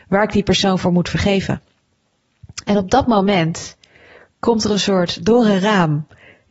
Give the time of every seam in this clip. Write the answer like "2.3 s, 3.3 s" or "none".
none